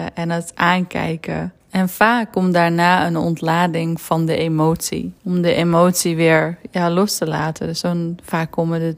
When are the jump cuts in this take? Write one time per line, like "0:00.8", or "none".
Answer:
0:01.6
0:05.2